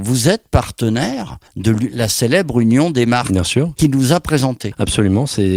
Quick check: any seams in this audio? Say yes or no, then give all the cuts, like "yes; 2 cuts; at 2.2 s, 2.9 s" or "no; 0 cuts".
yes; 1 cut; at 1.5 s